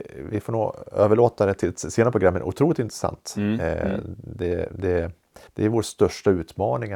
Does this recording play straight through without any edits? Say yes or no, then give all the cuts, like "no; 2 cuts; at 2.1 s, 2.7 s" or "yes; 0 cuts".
no; 1 cut; at 5.5 s